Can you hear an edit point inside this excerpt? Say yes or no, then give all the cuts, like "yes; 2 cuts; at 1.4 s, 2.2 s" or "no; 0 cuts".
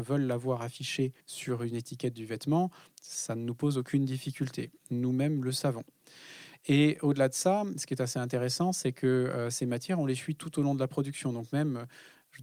yes; 1 cut; at 1.2 s